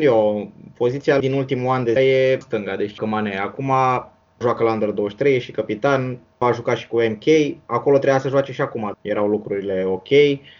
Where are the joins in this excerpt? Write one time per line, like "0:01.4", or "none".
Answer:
0:01.2
0:02.0
0:02.4
0:03.0
0:04.4
0:06.4
0:08.9